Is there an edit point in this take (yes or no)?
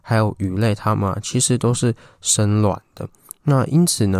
no